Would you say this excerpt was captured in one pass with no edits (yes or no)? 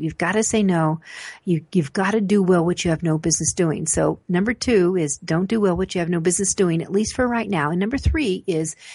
yes